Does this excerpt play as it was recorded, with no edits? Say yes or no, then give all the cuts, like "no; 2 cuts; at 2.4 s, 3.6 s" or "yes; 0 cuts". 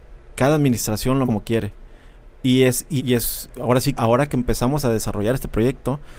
no; 3 cuts; at 1.2 s, 3.0 s, 4.0 s